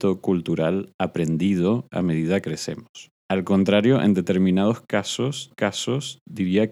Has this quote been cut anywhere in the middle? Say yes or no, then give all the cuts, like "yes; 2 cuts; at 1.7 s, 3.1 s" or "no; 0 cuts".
yes; 3 cuts; at 2.4 s, 3.2 s, 5.5 s